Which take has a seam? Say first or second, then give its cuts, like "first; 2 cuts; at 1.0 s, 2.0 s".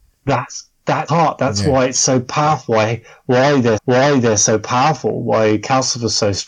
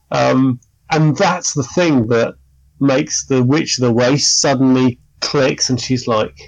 first; 2 cuts; at 1.1 s, 3.8 s